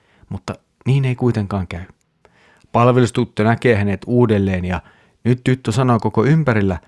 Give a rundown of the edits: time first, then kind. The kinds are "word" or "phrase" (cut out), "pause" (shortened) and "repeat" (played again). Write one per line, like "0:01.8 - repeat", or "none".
none

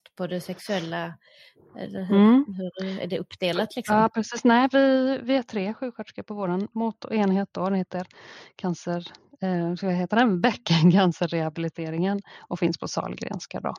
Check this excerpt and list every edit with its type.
none

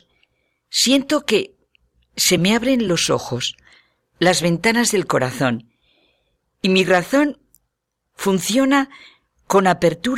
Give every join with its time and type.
none

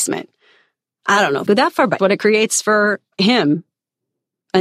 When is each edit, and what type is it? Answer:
0:01.5 - word
0:02.0 - phrase

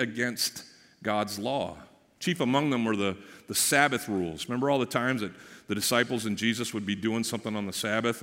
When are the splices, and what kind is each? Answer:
none

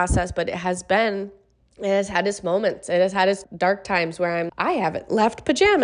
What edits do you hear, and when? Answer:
0:01.6 - pause
0:03.4 - word
0:04.5 - word

